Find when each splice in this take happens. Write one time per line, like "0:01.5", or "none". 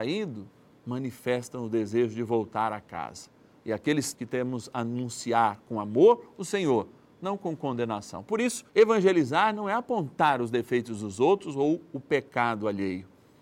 0:03.5
0:04.1
0:08.7